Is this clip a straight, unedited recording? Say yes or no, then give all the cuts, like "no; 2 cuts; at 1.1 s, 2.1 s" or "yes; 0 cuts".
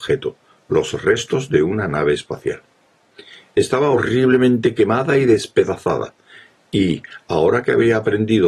yes; 0 cuts